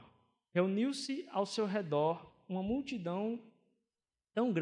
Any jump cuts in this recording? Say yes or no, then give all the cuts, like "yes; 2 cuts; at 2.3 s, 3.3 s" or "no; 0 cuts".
no; 0 cuts